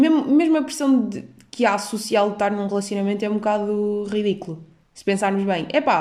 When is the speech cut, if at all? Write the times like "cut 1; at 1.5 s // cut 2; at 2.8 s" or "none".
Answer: none